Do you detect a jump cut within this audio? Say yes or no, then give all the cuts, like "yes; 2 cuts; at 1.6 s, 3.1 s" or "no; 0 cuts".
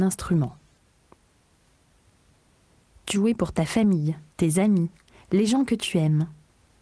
yes; 2 cuts; at 3.1 s, 4.3 s